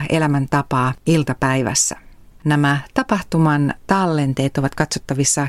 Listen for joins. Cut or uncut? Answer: uncut